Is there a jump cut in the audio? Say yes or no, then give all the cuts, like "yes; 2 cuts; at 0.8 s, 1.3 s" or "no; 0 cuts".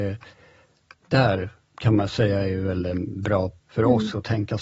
yes; 1 cut; at 3.6 s